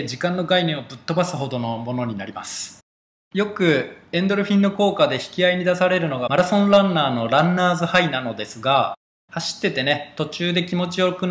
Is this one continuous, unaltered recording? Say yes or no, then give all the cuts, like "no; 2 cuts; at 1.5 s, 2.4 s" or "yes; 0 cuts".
yes; 0 cuts